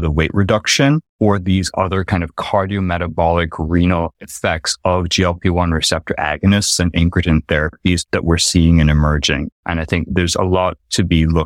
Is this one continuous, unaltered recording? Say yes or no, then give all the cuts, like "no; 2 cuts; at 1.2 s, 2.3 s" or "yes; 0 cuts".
yes; 0 cuts